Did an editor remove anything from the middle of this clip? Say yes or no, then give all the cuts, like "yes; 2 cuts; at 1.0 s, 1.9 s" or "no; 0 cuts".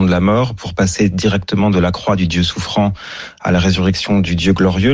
no; 0 cuts